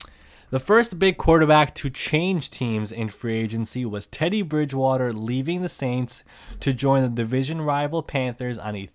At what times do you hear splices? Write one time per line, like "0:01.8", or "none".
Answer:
none